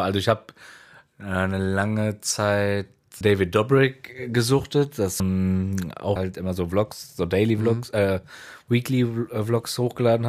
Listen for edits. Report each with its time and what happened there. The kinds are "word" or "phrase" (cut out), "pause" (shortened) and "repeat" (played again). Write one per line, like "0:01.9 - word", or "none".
0:03.2 - word
0:05.2 - word
0:06.2 - phrase